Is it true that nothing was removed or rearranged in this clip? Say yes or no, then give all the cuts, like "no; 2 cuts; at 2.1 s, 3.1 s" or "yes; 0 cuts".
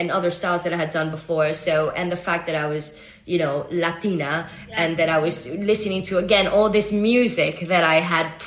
yes; 0 cuts